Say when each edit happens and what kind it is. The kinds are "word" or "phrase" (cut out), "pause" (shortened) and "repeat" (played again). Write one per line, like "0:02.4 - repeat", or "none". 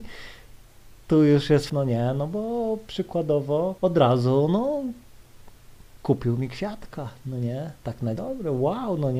0:01.7 - phrase
0:03.8 - pause
0:07.8 - pause
0:08.2 - word